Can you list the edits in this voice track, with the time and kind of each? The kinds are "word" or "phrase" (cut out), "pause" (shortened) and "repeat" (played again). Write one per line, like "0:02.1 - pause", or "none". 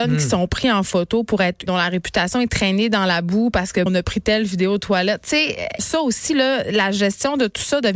0:01.7 - phrase
0:03.9 - word
0:05.8 - phrase